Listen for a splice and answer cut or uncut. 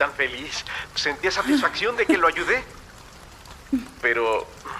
uncut